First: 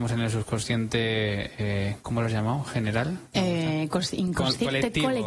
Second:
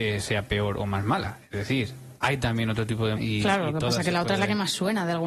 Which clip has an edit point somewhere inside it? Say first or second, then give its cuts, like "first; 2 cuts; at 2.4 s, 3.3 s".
second; 1 cut; at 3.1 s